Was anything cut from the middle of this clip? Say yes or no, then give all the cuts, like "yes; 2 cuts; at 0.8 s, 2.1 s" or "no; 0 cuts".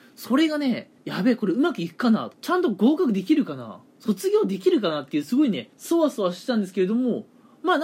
yes; 3 cuts; at 1.0 s, 2.3 s, 5.7 s